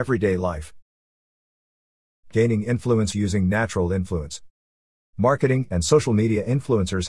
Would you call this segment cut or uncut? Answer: cut